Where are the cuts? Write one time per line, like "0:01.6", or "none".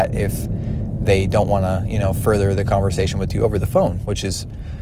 none